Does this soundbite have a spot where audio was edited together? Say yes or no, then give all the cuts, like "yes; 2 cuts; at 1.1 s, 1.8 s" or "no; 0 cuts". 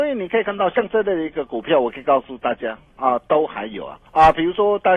yes; 1 cut; at 4.1 s